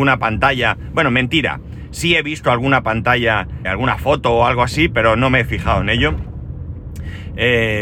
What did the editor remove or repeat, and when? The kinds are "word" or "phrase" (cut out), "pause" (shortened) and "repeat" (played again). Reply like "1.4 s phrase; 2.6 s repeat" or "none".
3.6 s word